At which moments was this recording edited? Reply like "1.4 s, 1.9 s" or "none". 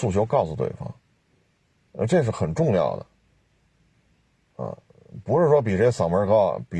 none

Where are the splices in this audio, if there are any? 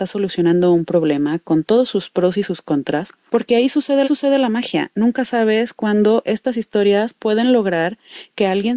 4.0 s

